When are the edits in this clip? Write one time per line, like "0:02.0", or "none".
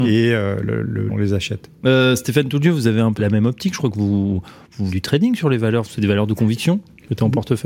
0:01.1
0:03.2
0:04.9
0:06.0